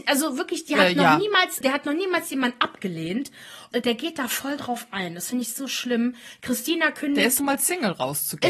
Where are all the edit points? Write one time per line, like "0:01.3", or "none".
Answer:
0:01.6
0:03.7
0:07.4